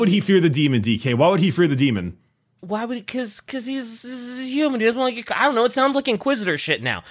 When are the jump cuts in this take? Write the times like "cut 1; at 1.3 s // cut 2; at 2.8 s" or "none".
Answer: none